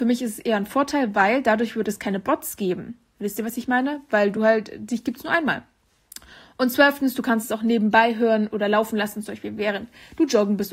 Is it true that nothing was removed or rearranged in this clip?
yes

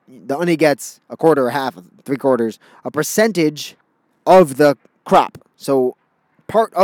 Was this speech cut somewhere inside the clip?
no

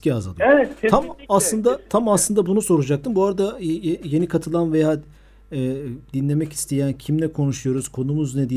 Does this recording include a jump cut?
no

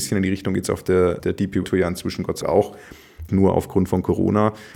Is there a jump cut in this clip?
yes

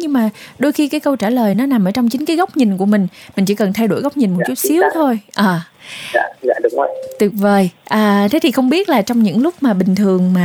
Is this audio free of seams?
yes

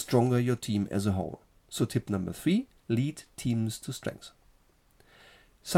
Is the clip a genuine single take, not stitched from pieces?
no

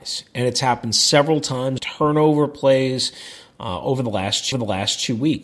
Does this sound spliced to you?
yes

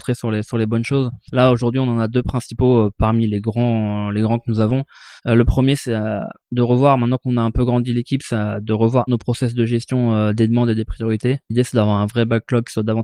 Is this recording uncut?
no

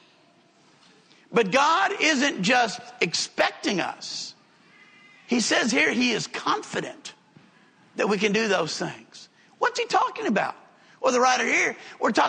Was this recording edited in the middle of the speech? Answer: no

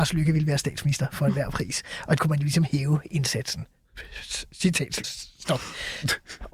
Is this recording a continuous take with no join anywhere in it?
no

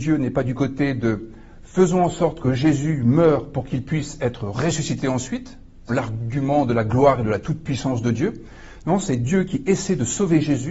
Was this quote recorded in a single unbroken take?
no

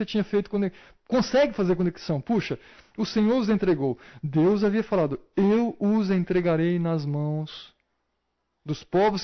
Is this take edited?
no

